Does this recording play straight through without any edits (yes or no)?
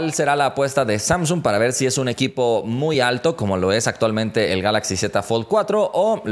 yes